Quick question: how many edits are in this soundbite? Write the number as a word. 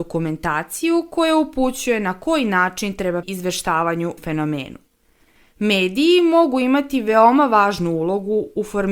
two